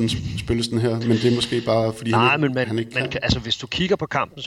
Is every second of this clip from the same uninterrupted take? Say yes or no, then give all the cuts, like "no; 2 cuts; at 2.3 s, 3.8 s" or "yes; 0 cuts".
yes; 0 cuts